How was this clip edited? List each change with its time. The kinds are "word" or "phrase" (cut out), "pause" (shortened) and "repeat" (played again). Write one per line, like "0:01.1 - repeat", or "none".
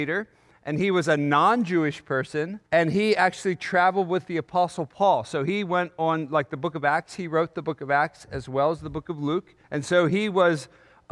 0:02.7 - pause
0:09.6 - pause